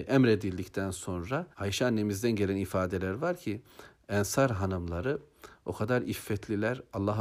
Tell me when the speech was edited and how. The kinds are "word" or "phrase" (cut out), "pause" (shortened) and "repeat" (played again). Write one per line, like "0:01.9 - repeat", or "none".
0:01.5 - pause